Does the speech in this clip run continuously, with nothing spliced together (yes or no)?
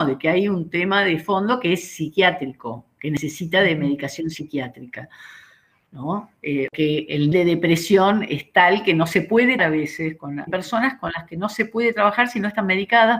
no